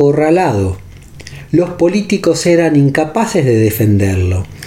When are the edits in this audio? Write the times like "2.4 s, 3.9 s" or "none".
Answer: none